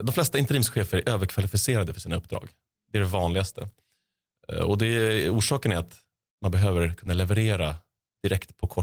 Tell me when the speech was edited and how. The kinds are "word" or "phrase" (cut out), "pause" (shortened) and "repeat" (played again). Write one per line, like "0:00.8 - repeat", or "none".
none